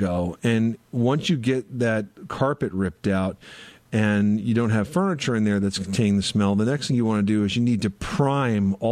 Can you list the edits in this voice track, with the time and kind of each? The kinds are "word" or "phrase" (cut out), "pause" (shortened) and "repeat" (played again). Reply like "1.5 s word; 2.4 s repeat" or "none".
none